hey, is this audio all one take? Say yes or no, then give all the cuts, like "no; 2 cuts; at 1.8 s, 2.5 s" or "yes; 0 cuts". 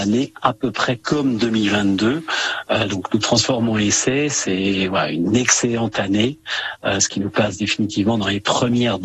yes; 0 cuts